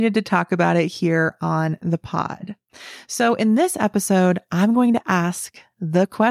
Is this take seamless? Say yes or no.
yes